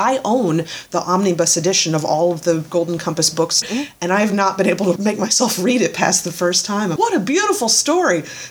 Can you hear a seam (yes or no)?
yes